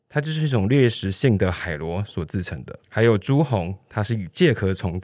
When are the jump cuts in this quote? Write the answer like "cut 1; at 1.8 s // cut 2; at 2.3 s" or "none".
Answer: cut 1; at 2.8 s